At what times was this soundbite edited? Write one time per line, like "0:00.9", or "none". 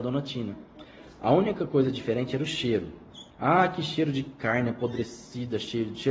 0:03.3